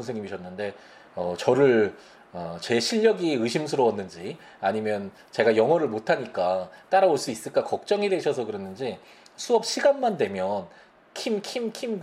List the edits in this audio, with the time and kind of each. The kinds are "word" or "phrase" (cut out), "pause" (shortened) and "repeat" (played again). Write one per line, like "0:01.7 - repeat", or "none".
none